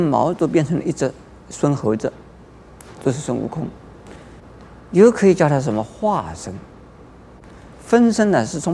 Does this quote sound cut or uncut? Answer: uncut